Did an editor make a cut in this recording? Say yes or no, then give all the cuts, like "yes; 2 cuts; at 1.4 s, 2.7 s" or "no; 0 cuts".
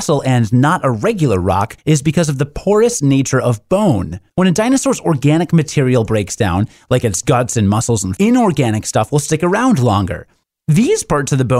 yes; 3 cuts; at 1.8 s, 4.3 s, 8.2 s